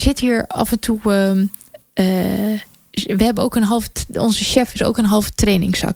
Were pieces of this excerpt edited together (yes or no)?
no